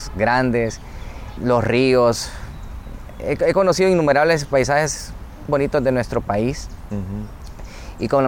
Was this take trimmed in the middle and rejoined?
yes; 2 cuts; at 1.4 s, 5.5 s

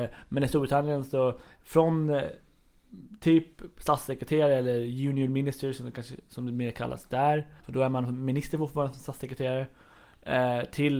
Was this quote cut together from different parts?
yes; 1 cut; at 7.6 s

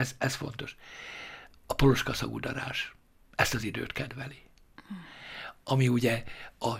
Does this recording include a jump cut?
no; 0 cuts

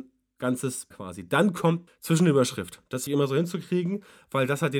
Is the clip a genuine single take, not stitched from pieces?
no; 3 cuts; at 0.9 s, 1.9 s, 3.1 s

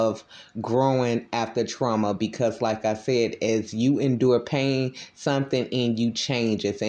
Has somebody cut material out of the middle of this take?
no; 0 cuts

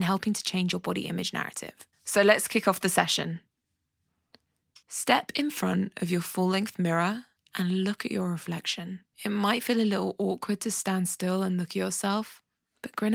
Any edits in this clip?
yes; 4 cuts; at 1.9 s, 4.8 s, 7.4 s, 9.1 s

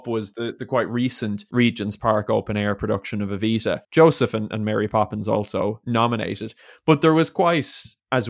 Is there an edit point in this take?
yes; 1 cut; at 3.8 s

